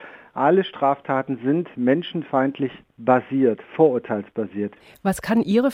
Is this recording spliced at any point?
no; 0 cuts

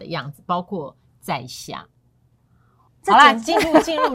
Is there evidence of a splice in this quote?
yes; 1 cut; at 2.9 s

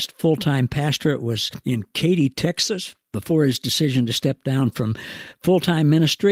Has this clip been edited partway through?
no; 0 cuts

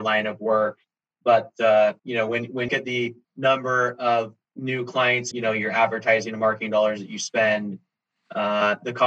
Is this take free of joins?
no; 5 cuts; at 2.0 s, 2.7 s, 3.2 s, 4.4 s, 5.3 s

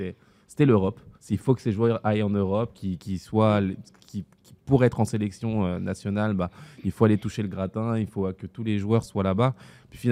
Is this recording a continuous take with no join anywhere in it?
no; 2 cuts; at 1.2 s, 9.0 s

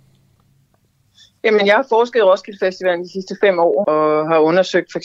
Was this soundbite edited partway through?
yes; 1 cut; at 3.8 s

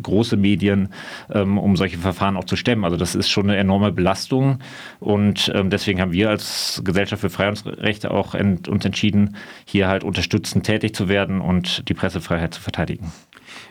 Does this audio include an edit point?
no; 0 cuts

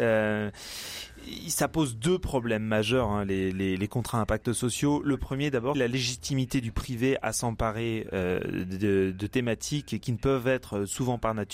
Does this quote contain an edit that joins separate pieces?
yes; 1 cut; at 5.7 s

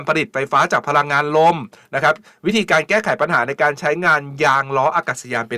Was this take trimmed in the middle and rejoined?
no; 0 cuts

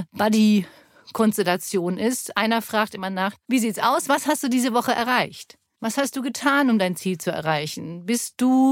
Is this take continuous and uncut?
yes; 0 cuts

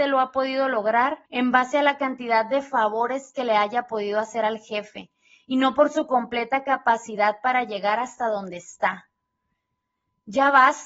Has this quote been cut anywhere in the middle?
yes; 1 cut; at 1.3 s

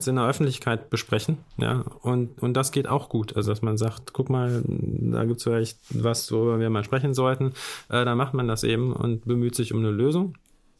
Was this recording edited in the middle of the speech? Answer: no; 0 cuts

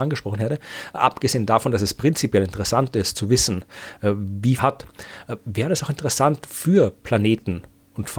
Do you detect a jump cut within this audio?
yes; 1 cut; at 4.6 s

